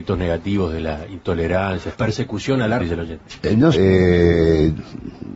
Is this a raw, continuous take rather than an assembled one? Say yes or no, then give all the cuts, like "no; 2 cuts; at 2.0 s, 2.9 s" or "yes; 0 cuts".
no; 3 cuts; at 1.9 s, 2.8 s, 3.7 s